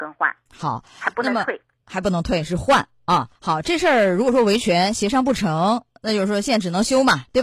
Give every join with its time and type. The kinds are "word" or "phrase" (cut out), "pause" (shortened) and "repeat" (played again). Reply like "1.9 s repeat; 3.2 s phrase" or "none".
3.3 s pause